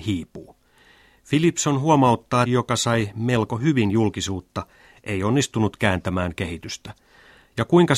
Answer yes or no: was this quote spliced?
yes